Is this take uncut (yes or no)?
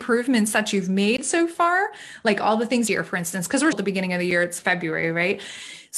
no